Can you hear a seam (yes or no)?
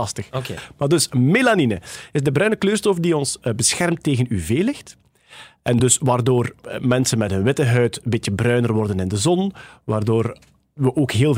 no